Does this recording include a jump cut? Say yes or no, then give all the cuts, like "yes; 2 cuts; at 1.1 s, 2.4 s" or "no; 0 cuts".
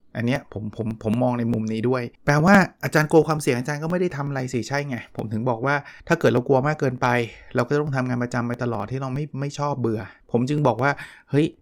yes; 3 cuts; at 2.1 s, 6.0 s, 10.2 s